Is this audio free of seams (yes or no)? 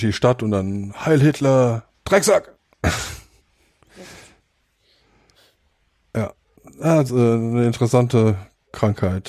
no